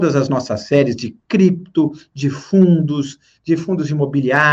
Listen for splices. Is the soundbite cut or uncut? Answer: uncut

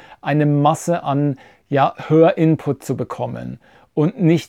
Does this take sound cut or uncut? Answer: uncut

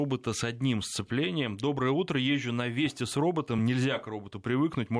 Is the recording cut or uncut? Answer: uncut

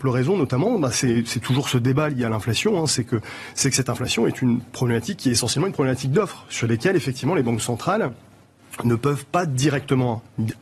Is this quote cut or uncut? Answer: uncut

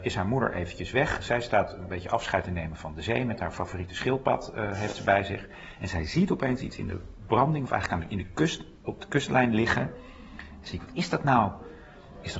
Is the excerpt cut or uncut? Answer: uncut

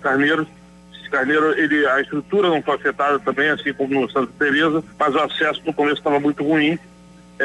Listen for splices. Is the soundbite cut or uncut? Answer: cut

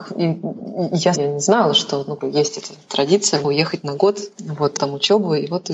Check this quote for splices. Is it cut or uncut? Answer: cut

